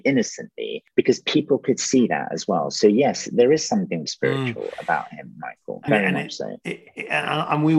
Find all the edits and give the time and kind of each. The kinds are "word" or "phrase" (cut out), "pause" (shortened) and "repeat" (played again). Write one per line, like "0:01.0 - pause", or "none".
0:04.1 - word
0:05.9 - word